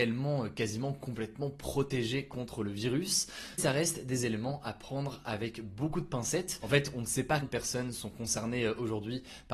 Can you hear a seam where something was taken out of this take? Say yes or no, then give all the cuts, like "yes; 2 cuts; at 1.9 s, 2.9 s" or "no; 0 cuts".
yes; 2 cuts; at 3.6 s, 7.4 s